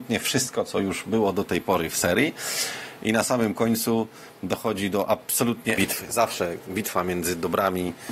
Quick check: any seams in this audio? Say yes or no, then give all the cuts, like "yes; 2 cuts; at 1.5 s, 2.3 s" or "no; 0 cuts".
yes; 1 cut; at 5.8 s